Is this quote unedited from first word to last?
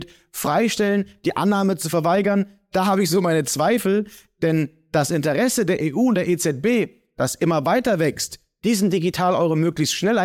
yes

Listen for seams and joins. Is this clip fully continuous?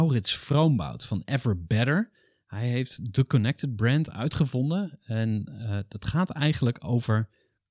yes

